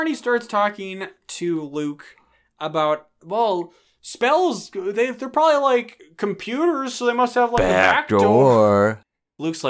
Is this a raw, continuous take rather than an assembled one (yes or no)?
yes